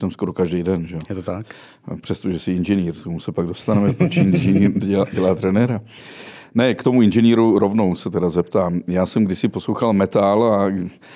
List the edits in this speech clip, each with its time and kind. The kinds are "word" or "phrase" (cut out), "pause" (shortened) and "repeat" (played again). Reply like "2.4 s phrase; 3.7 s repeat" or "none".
none

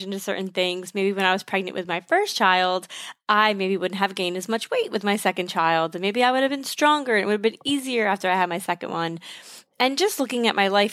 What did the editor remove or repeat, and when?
none

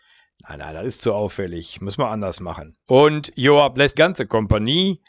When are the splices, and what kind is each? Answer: 2.8 s pause; 3.9 s word

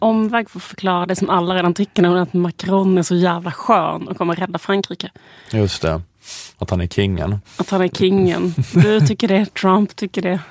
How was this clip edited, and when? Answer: none

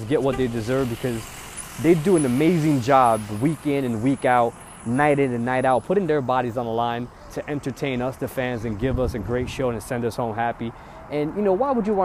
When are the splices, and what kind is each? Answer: none

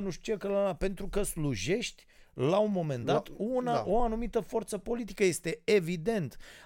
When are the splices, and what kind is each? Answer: none

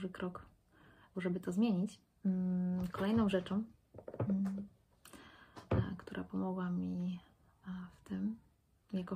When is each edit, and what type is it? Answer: 1.1 s phrase

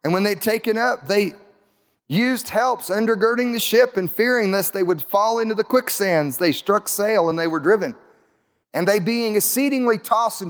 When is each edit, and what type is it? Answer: none

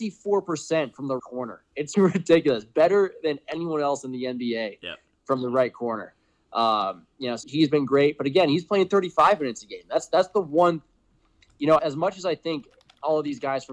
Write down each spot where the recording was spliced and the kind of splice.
1.2 s word; 1.9 s word; 7.4 s word; 11.8 s word

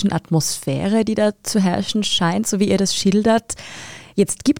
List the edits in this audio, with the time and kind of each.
none

